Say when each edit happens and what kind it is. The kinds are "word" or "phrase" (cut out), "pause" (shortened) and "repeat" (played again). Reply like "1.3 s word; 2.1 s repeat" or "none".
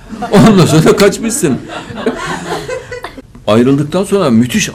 3.4 s pause